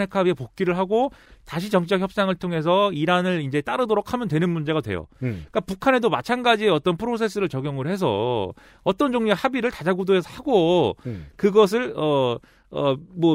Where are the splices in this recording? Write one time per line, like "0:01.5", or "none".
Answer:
none